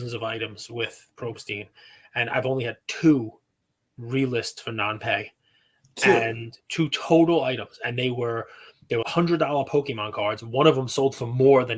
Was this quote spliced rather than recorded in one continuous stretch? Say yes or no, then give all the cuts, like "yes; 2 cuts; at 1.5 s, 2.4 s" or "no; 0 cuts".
yes; 2 cuts; at 6.6 s, 9.0 s